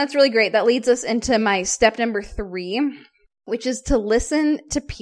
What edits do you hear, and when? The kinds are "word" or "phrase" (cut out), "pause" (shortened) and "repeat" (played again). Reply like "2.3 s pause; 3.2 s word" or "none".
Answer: none